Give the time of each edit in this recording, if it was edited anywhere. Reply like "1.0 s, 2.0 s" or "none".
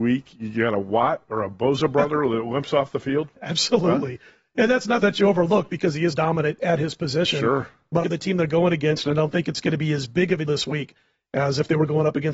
5.0 s, 6.1 s, 8.0 s, 10.5 s